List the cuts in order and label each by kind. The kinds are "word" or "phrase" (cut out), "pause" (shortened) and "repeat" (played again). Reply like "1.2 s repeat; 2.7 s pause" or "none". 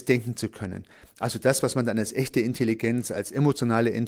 none